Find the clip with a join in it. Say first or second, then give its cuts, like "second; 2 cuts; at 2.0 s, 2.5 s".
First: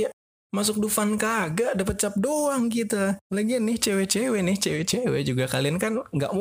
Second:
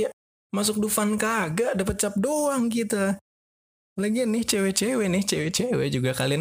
first; 1 cut; at 3.2 s